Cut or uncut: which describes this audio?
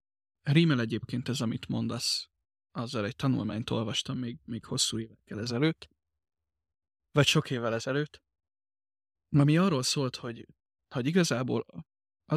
uncut